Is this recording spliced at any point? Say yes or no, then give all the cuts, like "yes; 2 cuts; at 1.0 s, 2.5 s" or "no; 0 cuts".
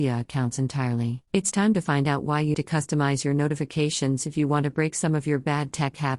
yes; 2 cuts; at 1.3 s, 2.5 s